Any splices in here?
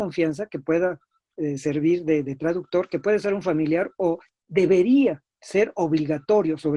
no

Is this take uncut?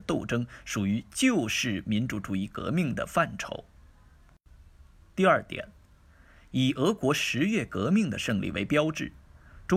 yes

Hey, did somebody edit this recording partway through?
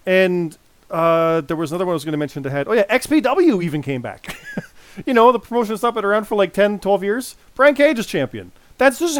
no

